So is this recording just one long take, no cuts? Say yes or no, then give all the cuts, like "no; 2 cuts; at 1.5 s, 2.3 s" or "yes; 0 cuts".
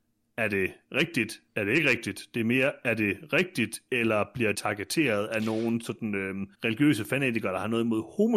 no; 3 cuts; at 1.5 s, 4.5 s, 6.5 s